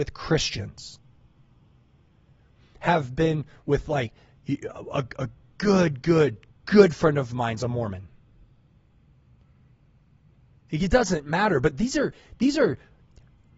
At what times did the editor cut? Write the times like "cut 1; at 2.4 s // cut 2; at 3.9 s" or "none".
none